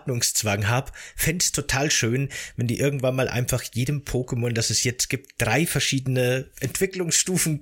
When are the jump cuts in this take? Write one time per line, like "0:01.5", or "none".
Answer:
none

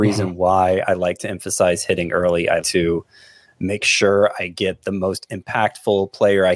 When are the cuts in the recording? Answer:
0:02.6

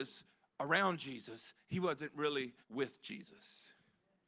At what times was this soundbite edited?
0:02.6

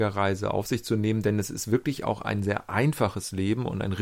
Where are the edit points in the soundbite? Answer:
none

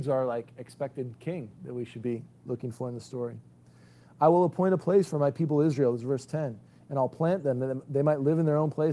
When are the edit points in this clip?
none

